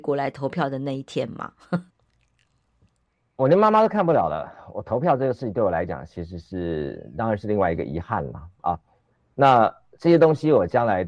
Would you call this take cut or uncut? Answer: cut